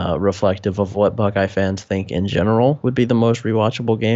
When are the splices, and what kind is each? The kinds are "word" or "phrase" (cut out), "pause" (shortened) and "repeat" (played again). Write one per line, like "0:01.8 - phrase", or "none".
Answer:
none